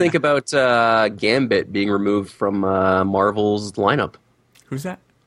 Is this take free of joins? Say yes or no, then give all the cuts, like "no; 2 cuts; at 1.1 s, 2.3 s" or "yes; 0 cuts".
yes; 0 cuts